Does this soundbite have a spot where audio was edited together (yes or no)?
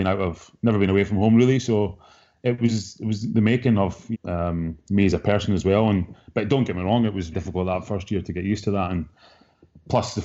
yes